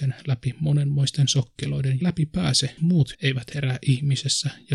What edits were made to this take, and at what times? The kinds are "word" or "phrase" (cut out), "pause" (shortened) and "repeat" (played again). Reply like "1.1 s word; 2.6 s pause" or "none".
2.0 s phrase; 2.8 s word; 3.1 s word